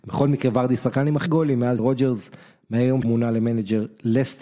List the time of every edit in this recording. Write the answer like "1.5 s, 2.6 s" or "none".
1.3 s, 1.8 s, 3.0 s